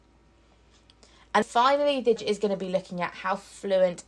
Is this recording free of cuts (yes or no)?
no